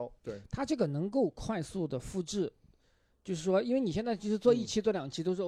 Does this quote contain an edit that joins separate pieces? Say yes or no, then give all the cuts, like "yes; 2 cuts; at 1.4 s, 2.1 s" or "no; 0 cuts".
no; 0 cuts